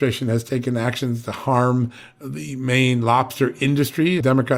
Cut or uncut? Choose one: uncut